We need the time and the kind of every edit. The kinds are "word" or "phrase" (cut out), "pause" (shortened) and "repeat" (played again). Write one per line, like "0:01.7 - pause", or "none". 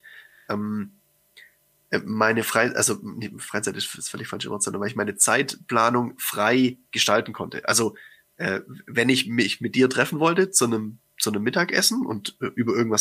none